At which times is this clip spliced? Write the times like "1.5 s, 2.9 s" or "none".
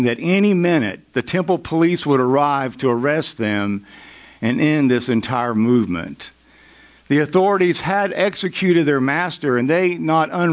none